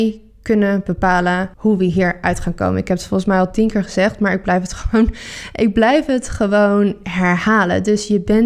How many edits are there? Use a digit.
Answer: 1